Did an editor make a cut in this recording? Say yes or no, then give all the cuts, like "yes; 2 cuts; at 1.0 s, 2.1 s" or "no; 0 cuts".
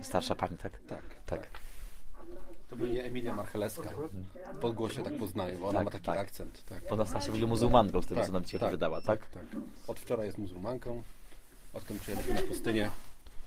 no; 0 cuts